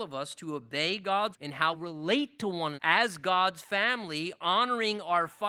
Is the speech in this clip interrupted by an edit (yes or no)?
yes